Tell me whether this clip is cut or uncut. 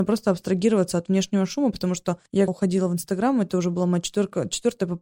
cut